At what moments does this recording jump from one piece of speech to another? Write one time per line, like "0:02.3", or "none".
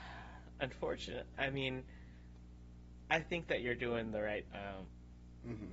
0:01.3
0:04.5